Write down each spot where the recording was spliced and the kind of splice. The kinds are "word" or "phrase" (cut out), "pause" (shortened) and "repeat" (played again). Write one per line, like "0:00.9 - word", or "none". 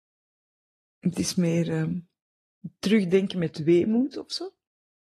none